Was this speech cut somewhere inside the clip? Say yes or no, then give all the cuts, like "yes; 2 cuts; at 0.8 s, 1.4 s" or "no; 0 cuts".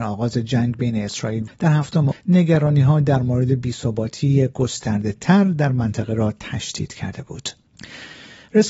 yes; 2 cuts; at 1.5 s, 2.1 s